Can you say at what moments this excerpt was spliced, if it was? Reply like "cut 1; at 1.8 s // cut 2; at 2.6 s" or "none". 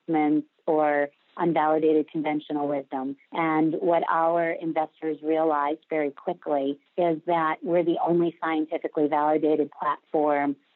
cut 1; at 3.2 s // cut 2; at 6.9 s